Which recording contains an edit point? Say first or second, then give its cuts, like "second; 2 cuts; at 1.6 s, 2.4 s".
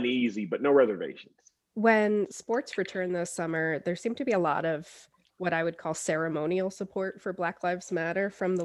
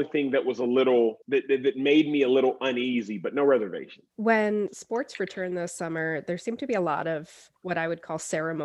second; 3 cuts; at 1.2 s, 4.1 s, 7.6 s